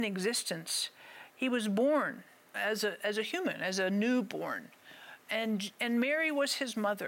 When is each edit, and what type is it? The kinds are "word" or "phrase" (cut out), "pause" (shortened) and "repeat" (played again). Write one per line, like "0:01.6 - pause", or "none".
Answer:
0:02.4 - pause